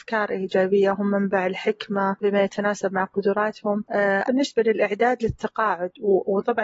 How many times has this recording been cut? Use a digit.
2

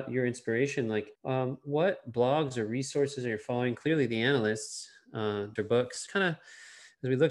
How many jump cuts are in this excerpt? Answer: 3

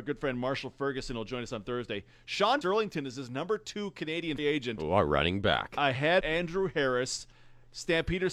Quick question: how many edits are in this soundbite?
3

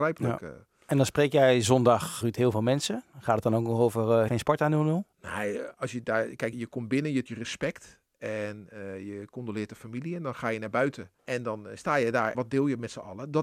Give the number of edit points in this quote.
7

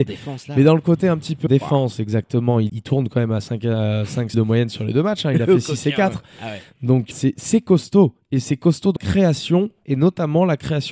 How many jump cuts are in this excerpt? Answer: 5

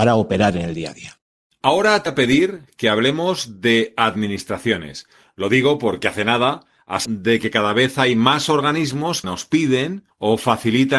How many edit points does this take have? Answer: 3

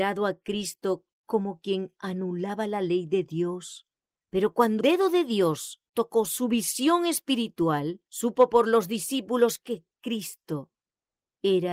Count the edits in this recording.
3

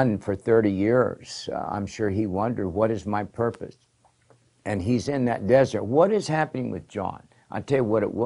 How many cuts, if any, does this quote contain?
0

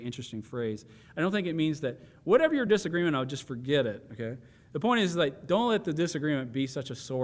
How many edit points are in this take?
0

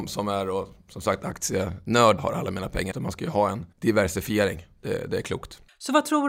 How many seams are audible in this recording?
3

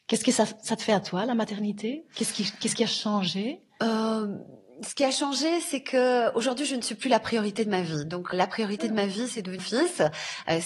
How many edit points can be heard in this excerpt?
2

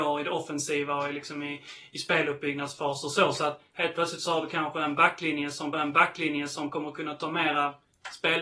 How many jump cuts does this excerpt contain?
1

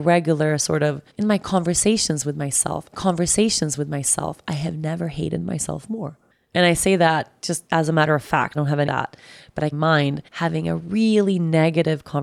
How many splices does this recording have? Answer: 8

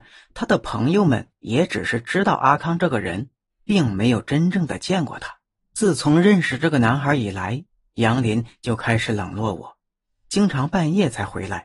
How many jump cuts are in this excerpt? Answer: 2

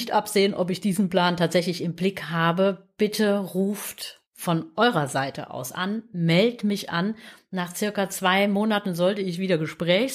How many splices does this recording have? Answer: 1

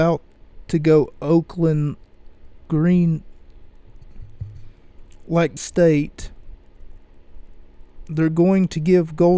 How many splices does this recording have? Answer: 2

